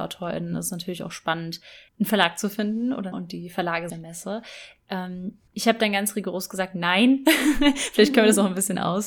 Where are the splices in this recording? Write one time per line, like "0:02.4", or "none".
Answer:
0:01.9
0:03.1
0:03.9
0:05.5